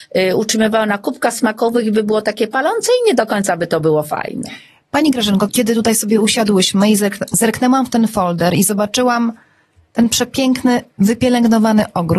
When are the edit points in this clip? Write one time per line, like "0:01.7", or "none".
0:05.5